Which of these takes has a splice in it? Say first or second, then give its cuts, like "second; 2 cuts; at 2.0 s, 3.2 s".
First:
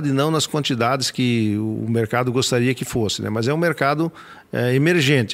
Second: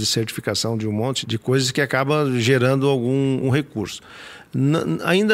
second; 2 cuts; at 1.2 s, 3.4 s